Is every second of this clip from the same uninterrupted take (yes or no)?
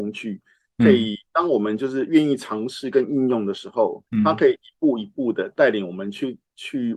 no